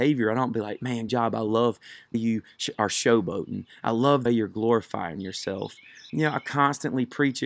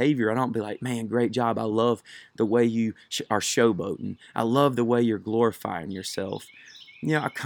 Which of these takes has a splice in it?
first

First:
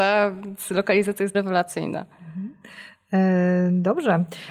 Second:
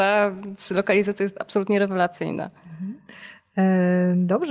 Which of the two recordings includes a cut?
first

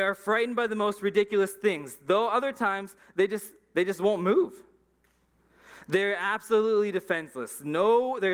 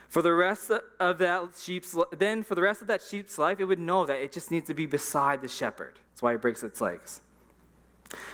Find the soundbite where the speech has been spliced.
second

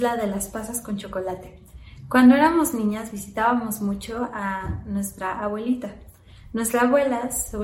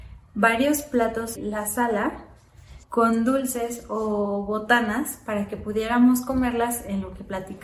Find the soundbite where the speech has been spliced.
second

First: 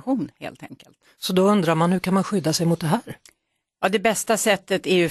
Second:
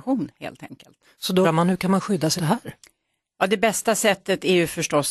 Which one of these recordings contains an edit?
second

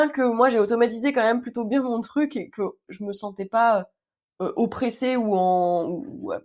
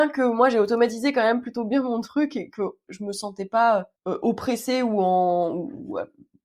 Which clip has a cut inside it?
second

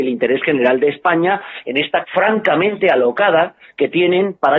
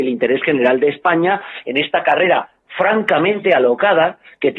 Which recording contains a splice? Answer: first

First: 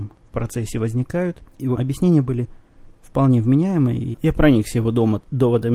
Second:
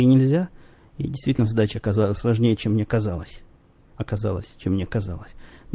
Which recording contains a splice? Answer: first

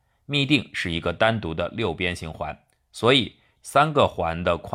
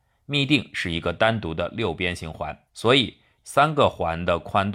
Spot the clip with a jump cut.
second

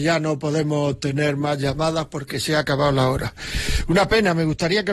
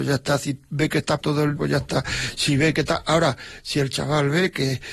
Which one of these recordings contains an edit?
second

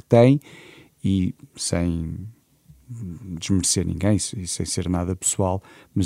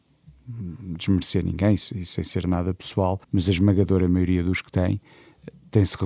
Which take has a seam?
second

